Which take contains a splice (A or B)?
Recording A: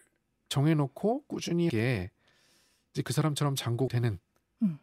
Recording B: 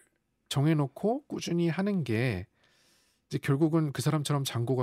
A